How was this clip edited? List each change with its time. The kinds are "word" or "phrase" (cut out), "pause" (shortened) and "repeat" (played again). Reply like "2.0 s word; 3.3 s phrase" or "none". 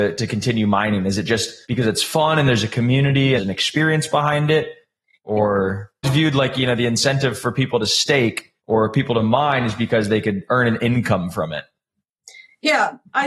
1.6 s pause; 3.4 s phrase; 6.0 s phrase; 8.6 s pause